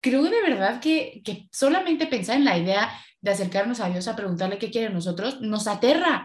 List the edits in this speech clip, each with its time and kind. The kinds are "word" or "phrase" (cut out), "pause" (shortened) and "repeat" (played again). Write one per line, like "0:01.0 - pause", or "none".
0:01.2 - word